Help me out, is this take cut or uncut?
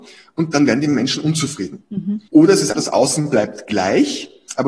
cut